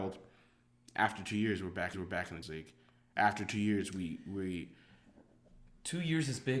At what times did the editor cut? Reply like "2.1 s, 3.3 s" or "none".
1.9 s, 2.4 s